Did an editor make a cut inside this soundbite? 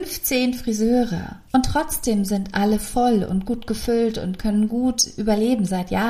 yes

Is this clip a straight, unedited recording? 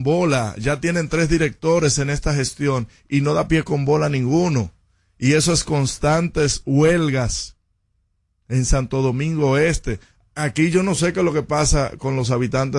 yes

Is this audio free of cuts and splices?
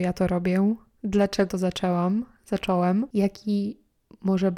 no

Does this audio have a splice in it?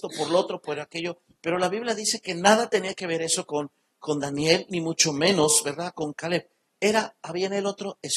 no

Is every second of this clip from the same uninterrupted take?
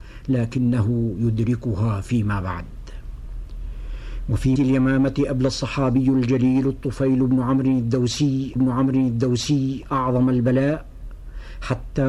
no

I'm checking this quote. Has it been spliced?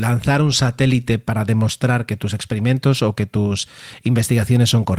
yes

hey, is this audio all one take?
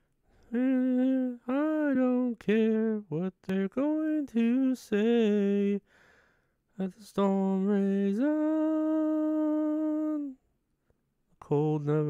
yes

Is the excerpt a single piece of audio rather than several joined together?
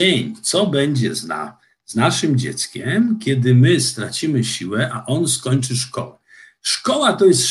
yes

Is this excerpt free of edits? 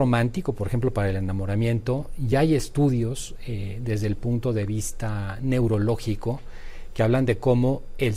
yes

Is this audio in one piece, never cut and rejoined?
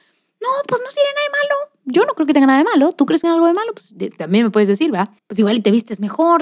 no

